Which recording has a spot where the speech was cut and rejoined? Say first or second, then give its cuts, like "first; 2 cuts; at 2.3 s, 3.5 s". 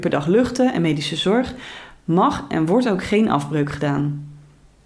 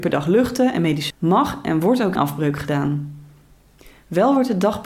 second; 2 cuts; at 1.1 s, 2.2 s